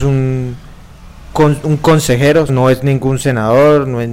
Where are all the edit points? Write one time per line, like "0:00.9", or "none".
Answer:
0:01.3
0:02.5